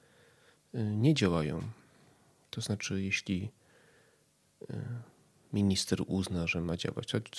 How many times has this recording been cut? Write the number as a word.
zero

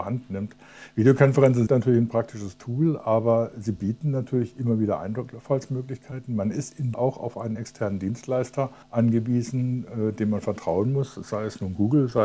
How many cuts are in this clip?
three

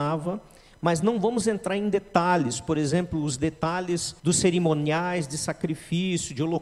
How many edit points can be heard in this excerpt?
one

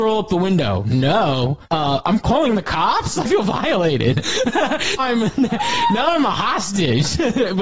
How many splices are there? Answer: three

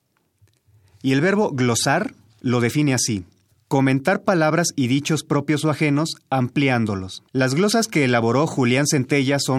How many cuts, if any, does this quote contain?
two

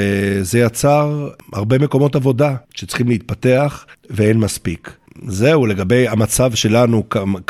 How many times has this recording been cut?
one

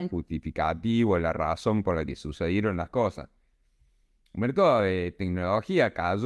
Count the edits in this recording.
zero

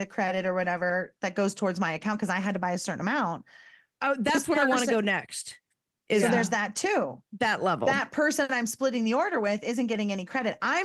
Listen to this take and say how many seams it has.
zero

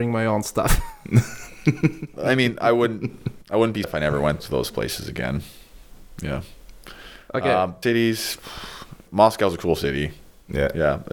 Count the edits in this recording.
five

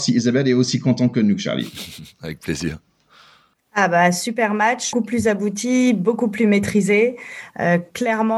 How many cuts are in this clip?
one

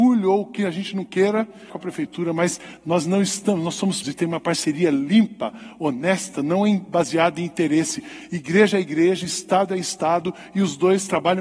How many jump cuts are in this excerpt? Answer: two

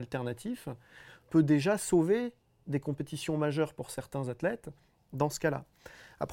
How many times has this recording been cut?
zero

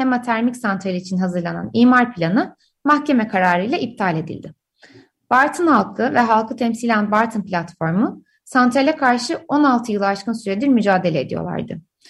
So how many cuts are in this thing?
zero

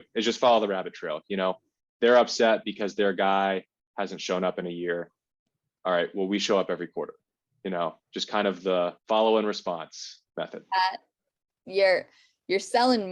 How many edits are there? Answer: two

